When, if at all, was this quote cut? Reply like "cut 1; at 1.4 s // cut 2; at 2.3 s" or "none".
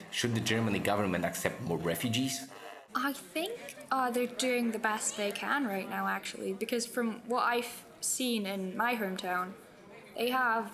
cut 1; at 2.9 s